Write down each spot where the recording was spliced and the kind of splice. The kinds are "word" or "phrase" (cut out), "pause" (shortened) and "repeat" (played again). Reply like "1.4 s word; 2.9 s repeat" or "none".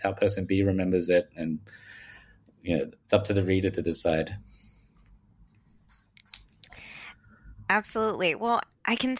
none